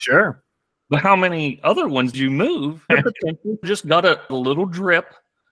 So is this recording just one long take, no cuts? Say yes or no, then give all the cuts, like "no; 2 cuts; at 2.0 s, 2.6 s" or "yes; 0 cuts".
no; 4 cuts; at 2.1 s, 2.9 s, 3.6 s, 4.3 s